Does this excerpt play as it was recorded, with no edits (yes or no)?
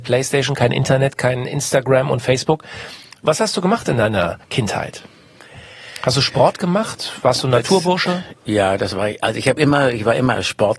yes